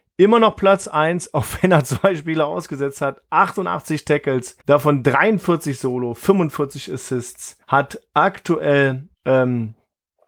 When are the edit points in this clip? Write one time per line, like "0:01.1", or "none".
0:04.6
0:07.6
0:09.1

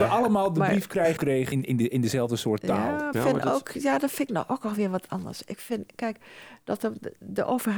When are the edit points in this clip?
0:01.2
0:01.5
0:03.1

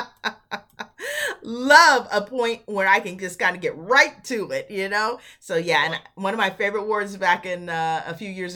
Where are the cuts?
none

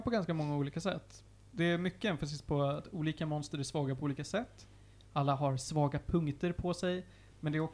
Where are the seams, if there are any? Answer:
none

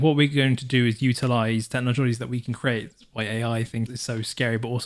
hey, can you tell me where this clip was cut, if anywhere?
0:03.9

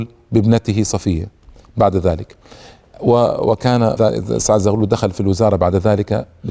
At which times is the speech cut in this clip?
0:04.0

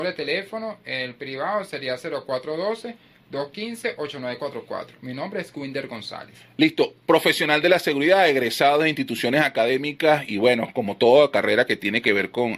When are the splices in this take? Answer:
none

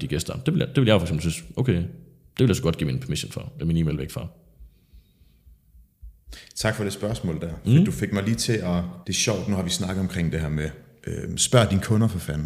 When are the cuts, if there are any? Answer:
0:09.0

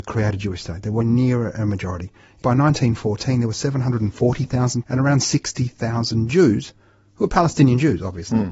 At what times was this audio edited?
0:01.0
0:02.4
0:04.8

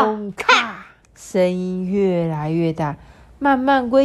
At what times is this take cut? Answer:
0:01.0

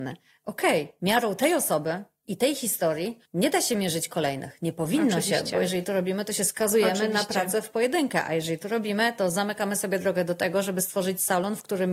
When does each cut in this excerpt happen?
none

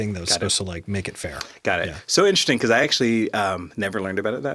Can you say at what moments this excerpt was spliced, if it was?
none

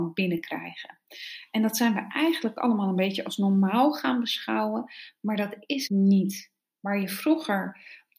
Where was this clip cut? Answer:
0:05.9

